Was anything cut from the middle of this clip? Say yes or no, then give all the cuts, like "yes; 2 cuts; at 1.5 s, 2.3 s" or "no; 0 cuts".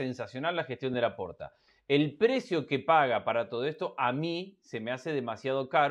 no; 0 cuts